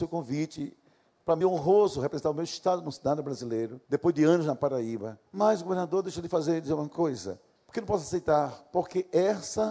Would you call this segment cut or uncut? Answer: cut